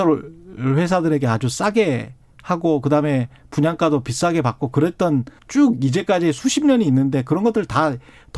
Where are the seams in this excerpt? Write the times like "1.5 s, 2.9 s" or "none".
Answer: 5.4 s